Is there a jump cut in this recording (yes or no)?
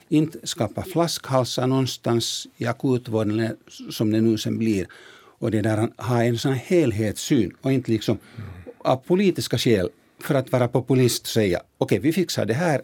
no